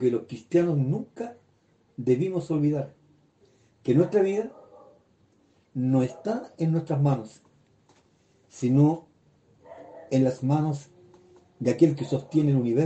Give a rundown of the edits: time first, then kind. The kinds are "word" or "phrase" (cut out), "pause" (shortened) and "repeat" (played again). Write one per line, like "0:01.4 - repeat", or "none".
none